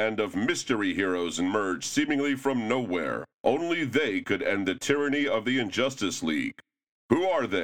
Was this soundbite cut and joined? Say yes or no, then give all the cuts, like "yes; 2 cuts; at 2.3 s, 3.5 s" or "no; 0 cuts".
yes; 1 cut; at 3.3 s